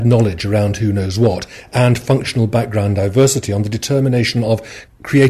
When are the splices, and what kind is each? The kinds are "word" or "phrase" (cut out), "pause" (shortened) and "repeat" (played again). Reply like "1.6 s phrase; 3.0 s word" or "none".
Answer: none